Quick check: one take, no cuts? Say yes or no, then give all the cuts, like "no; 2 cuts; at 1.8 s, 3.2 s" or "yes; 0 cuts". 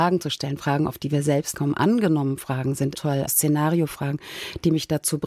no; 3 cuts; at 1.5 s, 2.9 s, 3.3 s